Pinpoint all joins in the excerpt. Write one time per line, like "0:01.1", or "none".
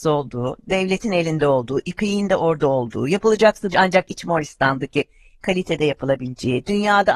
0:03.7